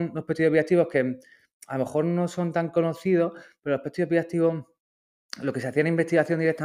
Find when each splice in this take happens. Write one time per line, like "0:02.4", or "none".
none